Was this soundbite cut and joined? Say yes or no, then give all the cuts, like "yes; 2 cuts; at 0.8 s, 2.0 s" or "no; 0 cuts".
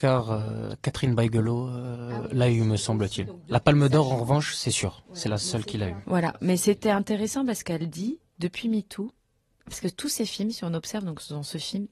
no; 0 cuts